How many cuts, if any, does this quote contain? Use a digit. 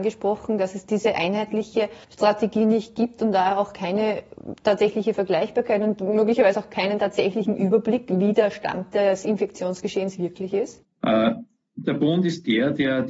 2